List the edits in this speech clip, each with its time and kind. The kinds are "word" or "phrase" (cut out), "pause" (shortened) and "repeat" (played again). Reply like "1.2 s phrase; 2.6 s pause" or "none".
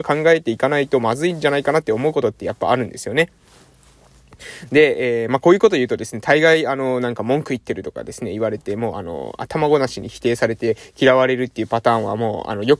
none